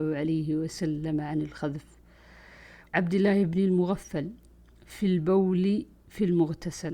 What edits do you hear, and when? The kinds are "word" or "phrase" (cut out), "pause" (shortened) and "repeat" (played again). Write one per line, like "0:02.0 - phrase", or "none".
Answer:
0:02.8 - word